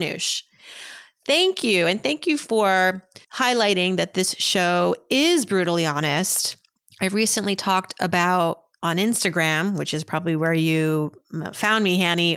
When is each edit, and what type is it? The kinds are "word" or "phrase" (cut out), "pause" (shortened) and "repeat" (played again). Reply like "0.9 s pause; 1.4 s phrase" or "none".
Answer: 3.2 s pause; 6.7 s pause

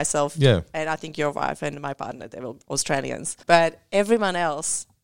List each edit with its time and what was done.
3.4 s pause

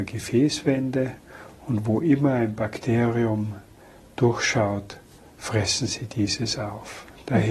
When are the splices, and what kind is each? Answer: none

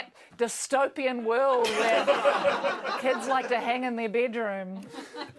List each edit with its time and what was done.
none

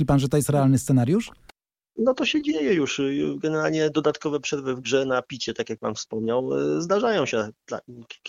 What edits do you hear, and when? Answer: none

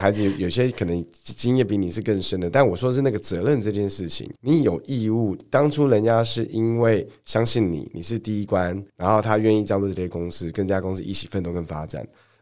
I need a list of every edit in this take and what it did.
4.4 s pause; 8.9 s pause

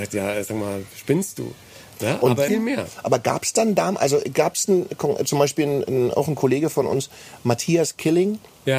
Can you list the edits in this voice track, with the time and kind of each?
2.5 s phrase

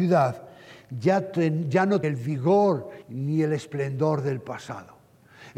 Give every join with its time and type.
2.0 s phrase; 3.0 s pause

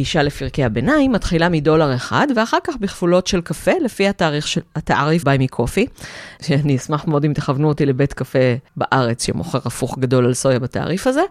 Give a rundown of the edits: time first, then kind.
5.2 s word; 6.4 s word; 8.7 s pause

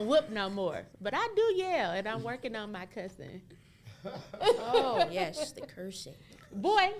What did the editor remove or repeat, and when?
0.9 s pause

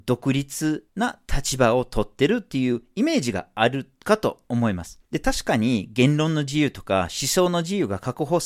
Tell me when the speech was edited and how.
5.1 s pause

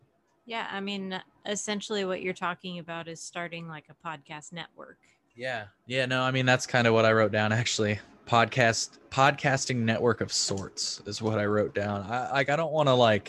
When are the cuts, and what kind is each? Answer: none

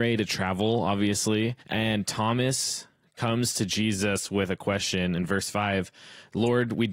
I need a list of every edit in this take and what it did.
1.6 s pause

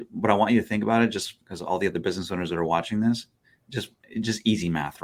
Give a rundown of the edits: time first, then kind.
none

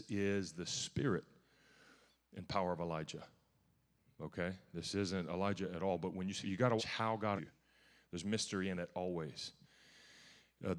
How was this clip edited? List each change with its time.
6.4 s word; 6.8 s word; 7.4 s word

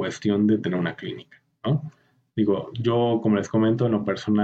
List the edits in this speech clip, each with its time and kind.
none

